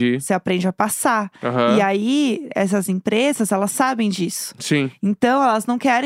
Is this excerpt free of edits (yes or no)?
yes